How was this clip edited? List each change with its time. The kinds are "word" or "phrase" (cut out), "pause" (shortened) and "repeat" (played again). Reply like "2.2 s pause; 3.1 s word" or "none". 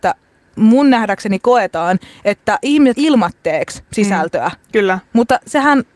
2.9 s word